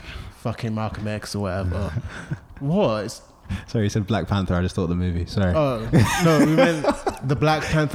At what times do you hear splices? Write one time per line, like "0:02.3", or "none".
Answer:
none